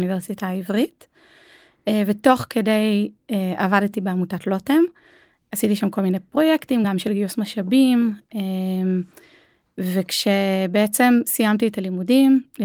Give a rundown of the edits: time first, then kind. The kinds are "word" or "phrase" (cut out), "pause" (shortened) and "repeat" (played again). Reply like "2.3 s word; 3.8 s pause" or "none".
none